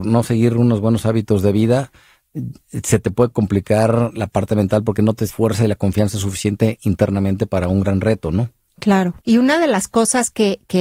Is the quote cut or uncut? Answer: cut